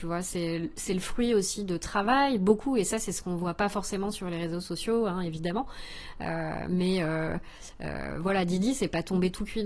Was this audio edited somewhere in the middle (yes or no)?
no